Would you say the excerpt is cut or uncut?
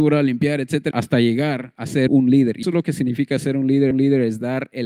cut